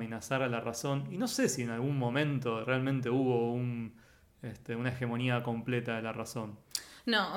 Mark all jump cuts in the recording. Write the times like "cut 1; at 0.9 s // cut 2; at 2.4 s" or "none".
none